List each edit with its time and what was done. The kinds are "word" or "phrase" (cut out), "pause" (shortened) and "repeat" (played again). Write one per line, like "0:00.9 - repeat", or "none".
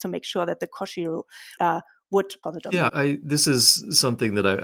0:01.6 - word
0:02.4 - phrase
0:02.9 - word